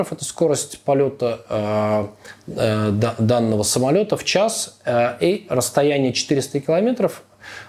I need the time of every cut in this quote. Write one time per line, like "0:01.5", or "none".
none